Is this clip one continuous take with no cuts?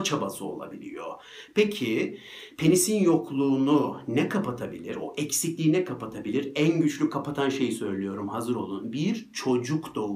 yes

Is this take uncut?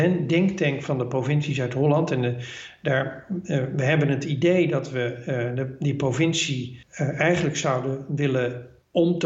no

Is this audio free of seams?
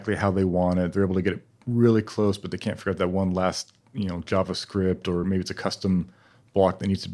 yes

